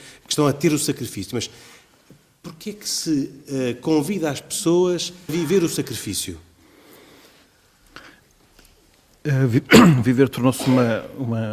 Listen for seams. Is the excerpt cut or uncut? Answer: cut